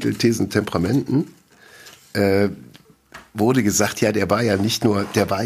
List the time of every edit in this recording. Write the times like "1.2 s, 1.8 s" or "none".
none